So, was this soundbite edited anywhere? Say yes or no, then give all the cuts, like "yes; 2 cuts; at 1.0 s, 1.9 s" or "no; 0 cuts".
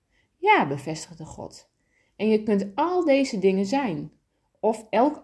no; 0 cuts